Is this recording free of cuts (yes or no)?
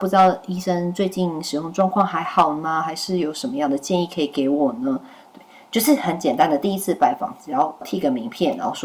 yes